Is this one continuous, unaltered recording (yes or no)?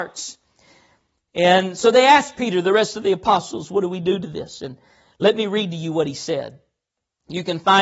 yes